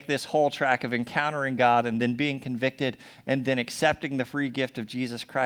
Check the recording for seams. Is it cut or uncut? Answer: uncut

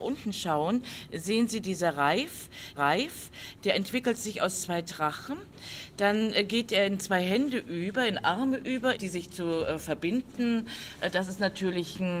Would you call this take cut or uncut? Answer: cut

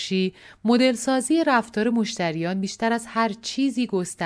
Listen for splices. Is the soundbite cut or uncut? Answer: uncut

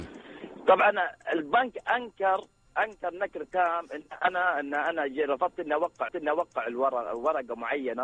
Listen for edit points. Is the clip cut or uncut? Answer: cut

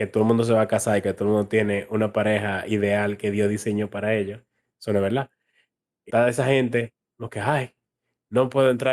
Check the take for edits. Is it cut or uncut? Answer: cut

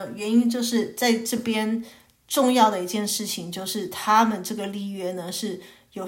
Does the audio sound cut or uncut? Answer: uncut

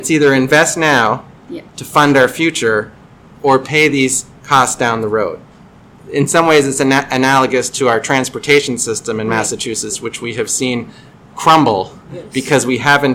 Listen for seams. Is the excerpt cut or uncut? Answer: uncut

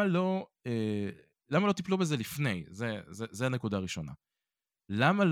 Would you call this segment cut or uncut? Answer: uncut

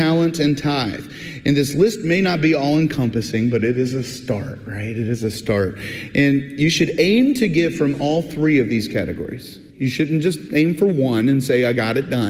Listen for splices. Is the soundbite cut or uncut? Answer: cut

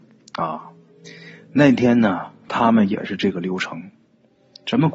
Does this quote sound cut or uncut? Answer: uncut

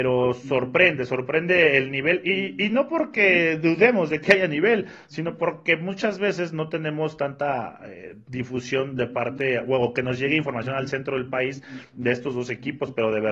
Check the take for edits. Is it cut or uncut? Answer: uncut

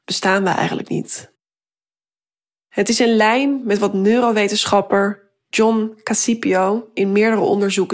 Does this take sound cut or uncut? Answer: uncut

